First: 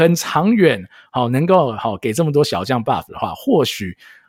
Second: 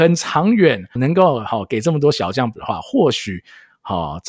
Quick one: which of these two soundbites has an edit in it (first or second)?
second